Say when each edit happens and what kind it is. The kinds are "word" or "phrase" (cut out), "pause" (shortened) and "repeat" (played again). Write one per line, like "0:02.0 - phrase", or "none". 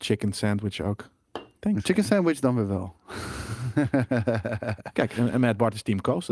none